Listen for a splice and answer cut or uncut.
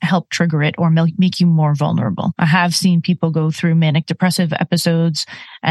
uncut